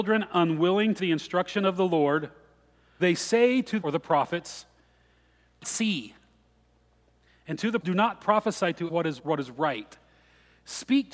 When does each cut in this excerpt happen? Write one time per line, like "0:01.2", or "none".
0:01.0
0:03.0
0:03.8
0:05.6
0:07.8
0:08.9
0:09.2